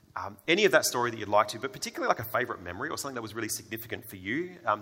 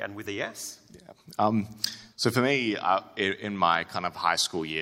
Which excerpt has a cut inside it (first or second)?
second